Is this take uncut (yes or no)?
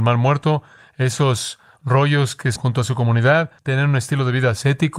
no